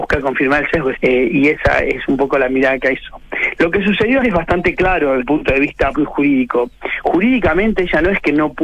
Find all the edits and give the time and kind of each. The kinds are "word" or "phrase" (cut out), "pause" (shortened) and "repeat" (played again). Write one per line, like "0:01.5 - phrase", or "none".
0:00.9 - word
0:01.3 - word
0:03.0 - word
0:04.2 - word
0:05.2 - word
0:05.9 - word